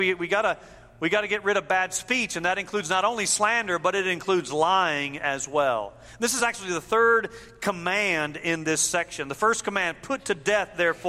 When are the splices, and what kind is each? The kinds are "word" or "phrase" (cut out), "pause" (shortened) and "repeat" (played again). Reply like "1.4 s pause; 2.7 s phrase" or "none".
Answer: none